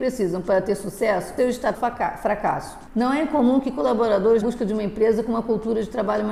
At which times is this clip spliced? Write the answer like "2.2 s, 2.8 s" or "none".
1.4 s, 1.7 s, 4.4 s